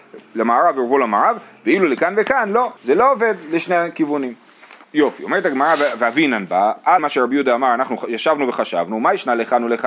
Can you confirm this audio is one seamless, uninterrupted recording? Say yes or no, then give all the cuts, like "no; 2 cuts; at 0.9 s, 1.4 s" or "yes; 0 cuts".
no; 3 cuts; at 2.8 s, 4.8 s, 7.0 s